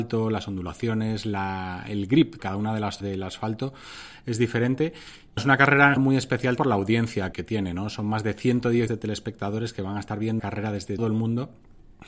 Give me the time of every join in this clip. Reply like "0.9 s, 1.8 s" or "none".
2.4 s, 3.0 s, 5.4 s, 6.0 s, 6.6 s, 7.3 s, 8.9 s, 10.4 s, 11.0 s